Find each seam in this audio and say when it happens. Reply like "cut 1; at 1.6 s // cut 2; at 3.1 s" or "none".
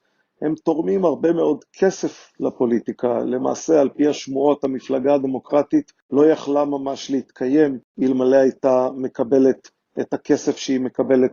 none